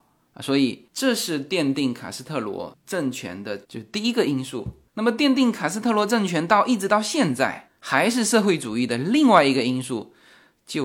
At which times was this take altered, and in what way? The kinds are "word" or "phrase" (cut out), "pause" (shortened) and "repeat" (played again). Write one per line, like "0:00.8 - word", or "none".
0:03.6 - pause